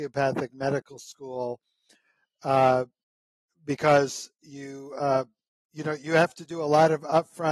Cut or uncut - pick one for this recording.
uncut